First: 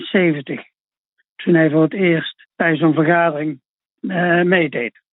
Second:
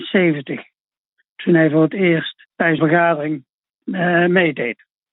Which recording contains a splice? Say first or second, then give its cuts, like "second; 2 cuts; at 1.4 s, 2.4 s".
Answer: second; 1 cut; at 2.8 s